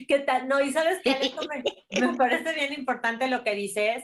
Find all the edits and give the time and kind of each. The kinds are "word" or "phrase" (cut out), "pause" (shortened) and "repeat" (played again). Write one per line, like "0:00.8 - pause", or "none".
none